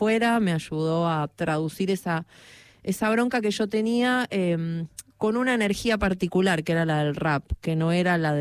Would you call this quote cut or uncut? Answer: cut